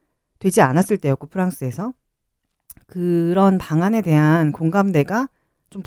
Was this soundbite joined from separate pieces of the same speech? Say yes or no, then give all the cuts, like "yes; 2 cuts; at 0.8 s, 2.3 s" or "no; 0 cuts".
no; 0 cuts